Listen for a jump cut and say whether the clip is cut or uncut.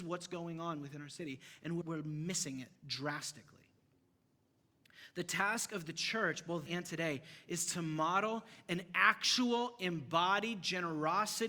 cut